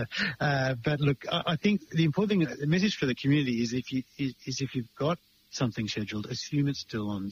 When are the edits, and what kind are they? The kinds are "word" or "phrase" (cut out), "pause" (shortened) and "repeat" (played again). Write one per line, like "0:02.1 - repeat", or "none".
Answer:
0:05.3 - pause